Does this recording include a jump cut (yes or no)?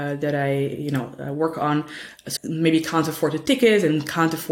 yes